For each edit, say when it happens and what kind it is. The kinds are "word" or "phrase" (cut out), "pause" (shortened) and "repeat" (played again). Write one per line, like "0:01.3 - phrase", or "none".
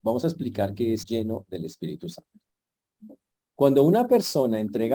0:01.0 - word